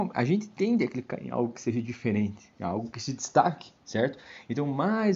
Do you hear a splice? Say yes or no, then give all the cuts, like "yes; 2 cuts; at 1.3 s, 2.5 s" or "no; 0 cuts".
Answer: yes; 1 cut; at 3.8 s